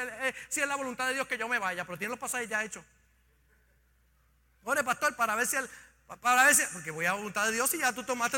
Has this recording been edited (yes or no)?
no